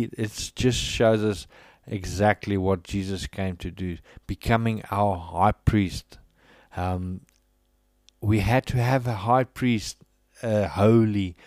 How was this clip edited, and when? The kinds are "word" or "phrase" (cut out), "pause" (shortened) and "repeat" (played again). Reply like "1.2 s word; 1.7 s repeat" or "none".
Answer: none